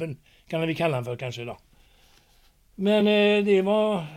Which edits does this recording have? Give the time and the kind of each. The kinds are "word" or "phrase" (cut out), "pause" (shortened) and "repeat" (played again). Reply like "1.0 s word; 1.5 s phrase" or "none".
none